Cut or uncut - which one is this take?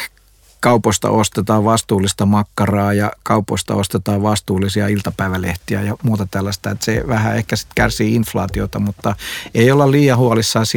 uncut